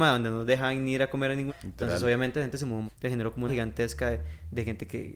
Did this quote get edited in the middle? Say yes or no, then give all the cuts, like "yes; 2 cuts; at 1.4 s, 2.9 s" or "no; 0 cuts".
yes; 3 cuts; at 1.5 s, 2.9 s, 3.5 s